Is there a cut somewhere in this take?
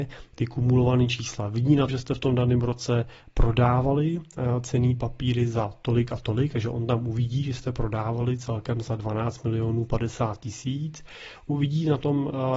yes; 1 cut; at 1.9 s

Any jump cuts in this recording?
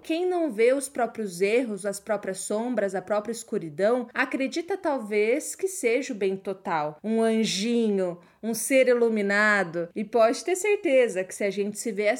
no; 0 cuts

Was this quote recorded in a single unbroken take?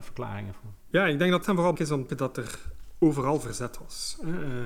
no; 3 cuts; at 1.4 s, 1.8 s, 2.1 s

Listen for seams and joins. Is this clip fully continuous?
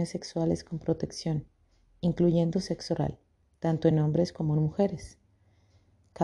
yes; 0 cuts

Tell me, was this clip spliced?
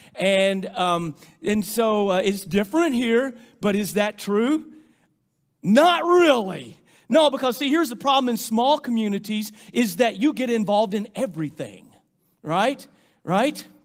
no; 0 cuts

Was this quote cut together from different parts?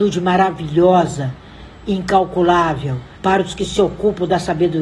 yes; 1 cut; at 3.2 s

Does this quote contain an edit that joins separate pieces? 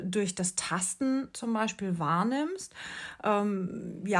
no; 0 cuts

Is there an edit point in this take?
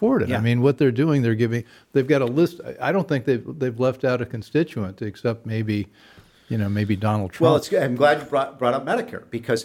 no; 0 cuts

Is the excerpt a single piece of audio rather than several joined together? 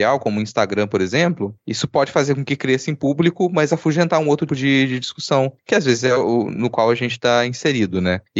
no; 1 cut; at 4.5 s

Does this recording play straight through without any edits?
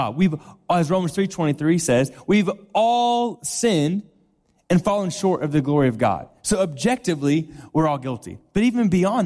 yes; 0 cuts

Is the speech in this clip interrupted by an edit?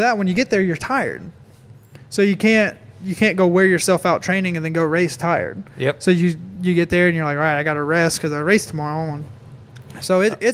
no; 0 cuts

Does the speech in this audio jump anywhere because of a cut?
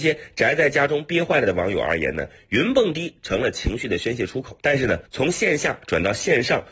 yes; 2 cuts; at 4.6 s, 5.0 s

